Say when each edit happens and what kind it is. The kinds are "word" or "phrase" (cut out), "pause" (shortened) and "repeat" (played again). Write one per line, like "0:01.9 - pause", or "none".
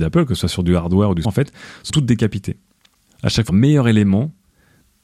0:01.2 - word
0:01.9 - word
0:03.5 - word